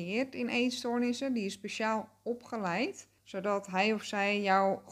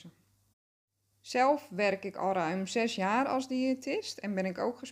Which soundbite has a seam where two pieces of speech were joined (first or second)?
first